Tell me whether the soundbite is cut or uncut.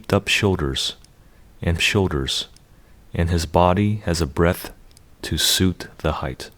cut